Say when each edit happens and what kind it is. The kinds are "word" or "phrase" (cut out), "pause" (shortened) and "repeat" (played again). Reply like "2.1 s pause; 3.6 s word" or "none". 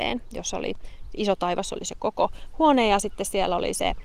none